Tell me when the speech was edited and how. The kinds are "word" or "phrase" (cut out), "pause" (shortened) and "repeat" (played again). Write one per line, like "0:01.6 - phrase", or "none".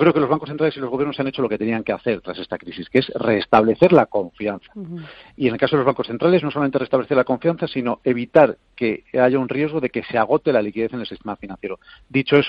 none